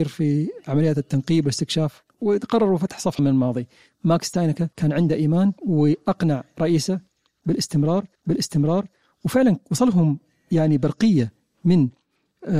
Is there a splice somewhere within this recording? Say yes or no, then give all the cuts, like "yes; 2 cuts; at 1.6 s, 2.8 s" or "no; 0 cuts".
yes; 5 cuts; at 2.1 s, 3.2 s, 4.7 s, 5.6 s, 8.1 s